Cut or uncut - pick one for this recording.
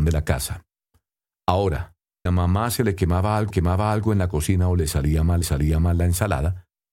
cut